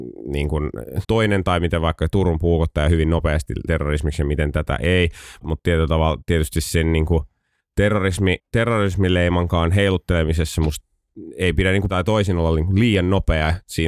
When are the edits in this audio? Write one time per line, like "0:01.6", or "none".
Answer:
0:01.0
0:03.7
0:05.4
0:08.4
0:11.9